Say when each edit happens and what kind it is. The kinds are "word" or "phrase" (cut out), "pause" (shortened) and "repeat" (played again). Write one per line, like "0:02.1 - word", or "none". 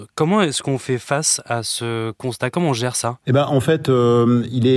none